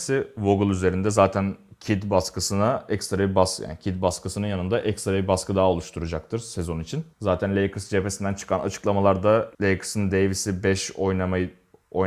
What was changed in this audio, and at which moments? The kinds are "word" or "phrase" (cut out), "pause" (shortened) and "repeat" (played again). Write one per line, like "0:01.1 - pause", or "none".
0:07.1 - pause
0:09.5 - pause